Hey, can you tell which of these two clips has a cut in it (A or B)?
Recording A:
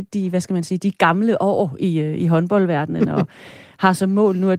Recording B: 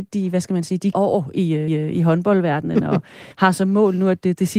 B